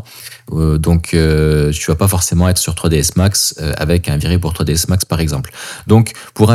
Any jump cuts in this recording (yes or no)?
no